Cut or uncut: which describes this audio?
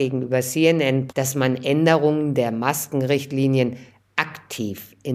cut